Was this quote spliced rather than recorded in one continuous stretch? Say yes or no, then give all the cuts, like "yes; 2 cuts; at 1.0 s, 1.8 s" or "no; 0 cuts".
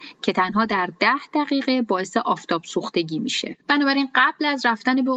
yes; 1 cut; at 3.6 s